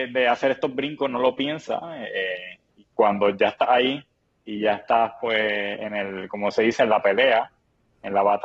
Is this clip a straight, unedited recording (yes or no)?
yes